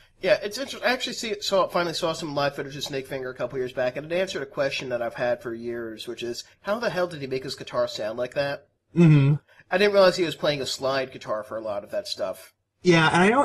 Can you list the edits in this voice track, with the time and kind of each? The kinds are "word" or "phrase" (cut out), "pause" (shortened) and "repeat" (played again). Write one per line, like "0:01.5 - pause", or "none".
none